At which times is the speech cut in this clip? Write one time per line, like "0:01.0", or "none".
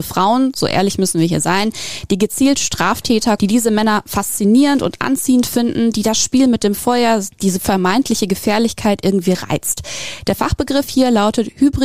0:03.4